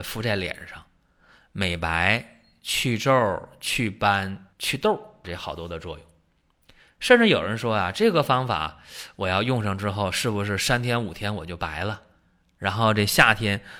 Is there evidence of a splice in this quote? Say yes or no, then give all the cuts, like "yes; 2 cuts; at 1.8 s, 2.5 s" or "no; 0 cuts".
yes; 2 cuts; at 4.5 s, 5.2 s